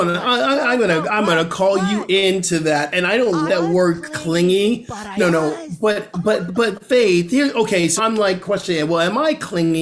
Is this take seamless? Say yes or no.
no